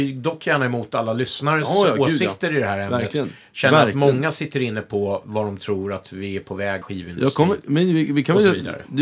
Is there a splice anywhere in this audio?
yes; 1 cut; at 6.8 s

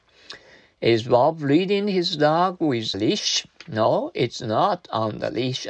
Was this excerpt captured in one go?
no; 1 cut; at 2.9 s

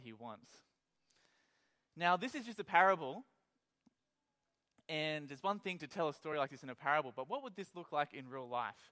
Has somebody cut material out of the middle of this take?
no; 0 cuts

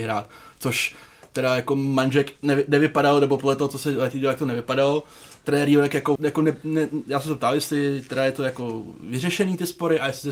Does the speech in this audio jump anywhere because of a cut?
yes; 1 cut; at 6.2 s

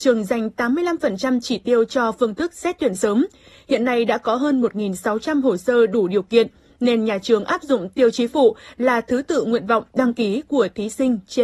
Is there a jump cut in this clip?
no; 0 cuts

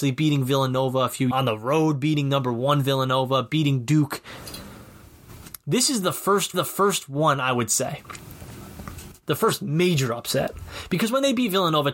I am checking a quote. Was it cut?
yes; 2 cuts; at 1.3 s, 6.5 s

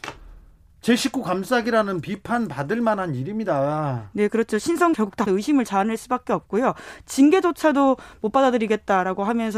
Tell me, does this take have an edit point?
yes; 2 cuts; at 4.9 s, 5.3 s

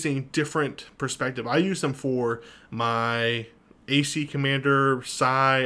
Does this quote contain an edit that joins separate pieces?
no; 0 cuts

